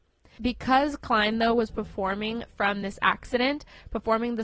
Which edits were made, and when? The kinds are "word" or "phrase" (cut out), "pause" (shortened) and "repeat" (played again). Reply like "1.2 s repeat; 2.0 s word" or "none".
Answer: none